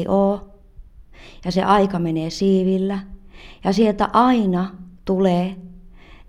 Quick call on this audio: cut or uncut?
cut